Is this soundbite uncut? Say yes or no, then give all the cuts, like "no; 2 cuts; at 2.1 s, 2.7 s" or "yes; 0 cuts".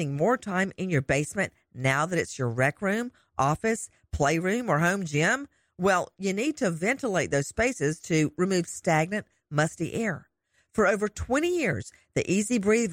yes; 0 cuts